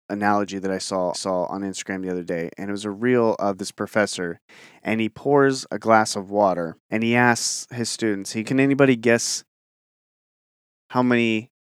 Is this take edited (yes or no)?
yes